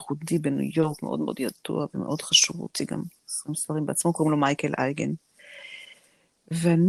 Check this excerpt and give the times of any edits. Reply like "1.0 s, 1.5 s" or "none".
none